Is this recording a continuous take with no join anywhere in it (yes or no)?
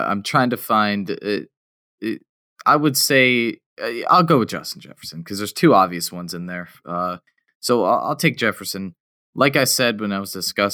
yes